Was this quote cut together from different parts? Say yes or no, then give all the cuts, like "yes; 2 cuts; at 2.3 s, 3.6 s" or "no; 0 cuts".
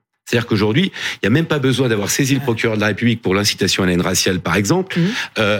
no; 0 cuts